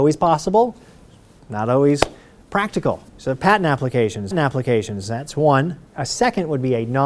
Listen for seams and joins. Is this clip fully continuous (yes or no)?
no